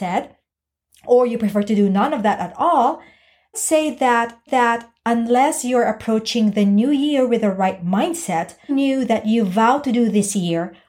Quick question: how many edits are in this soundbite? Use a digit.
3